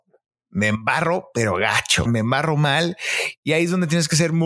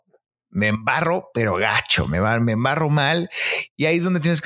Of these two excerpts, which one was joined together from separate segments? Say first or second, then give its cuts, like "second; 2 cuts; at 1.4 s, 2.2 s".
first; 1 cut; at 2.1 s